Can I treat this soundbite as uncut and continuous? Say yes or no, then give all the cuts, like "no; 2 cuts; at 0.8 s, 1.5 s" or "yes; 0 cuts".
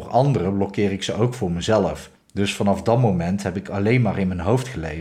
no; 1 cut; at 2.2 s